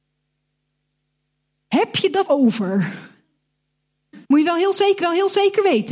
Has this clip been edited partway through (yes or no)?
yes